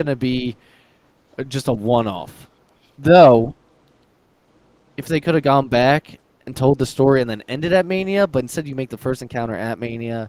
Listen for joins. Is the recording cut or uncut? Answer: cut